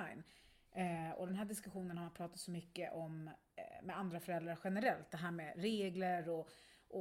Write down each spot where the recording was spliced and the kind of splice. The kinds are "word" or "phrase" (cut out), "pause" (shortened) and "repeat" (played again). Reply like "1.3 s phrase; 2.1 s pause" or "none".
none

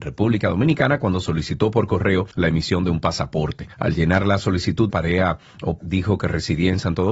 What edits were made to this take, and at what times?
2.3 s pause; 3.7 s pause; 4.9 s phrase; 5.8 s word

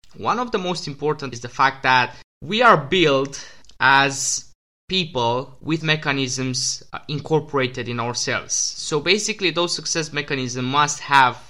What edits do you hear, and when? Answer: 1.3 s word; 5.8 s word

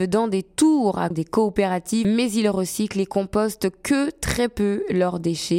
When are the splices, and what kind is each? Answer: 1.1 s phrase

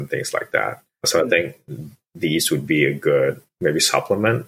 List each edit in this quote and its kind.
none

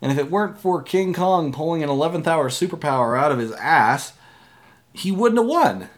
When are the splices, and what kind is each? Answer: none

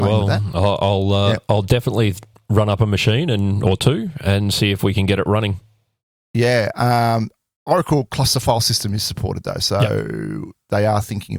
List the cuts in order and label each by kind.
none

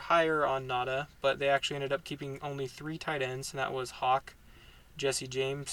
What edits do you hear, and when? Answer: none

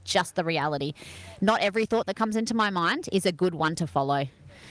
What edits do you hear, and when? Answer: none

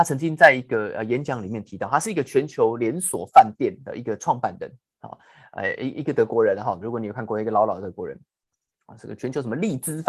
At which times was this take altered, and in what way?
none

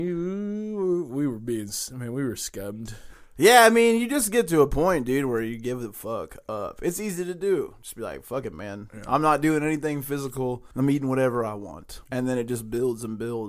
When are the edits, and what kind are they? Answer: 10.7 s pause; 12.1 s pause

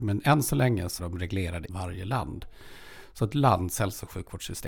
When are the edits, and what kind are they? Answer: 1.0 s word; 1.7 s word

